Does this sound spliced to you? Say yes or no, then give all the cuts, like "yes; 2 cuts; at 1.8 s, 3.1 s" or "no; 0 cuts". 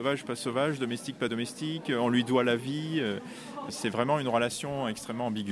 no; 0 cuts